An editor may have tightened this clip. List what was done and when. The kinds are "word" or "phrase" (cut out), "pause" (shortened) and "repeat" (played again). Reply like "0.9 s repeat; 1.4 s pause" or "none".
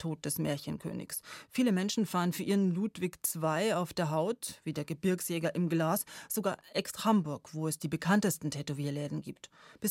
7.0 s word